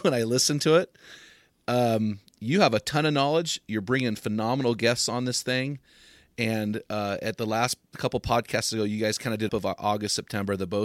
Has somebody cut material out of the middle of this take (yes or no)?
yes